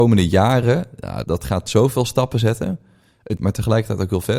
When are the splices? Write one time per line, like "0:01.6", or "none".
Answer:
0:01.2
0:03.4